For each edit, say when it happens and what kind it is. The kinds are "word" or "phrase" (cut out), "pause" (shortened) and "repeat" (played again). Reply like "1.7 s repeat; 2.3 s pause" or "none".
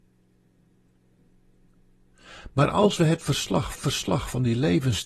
3.7 s repeat